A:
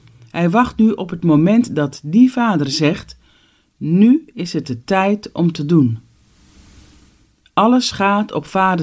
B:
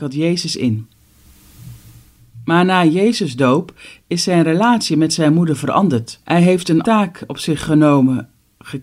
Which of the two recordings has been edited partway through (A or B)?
B